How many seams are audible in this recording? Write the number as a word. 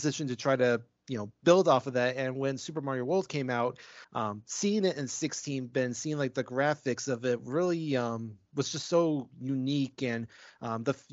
one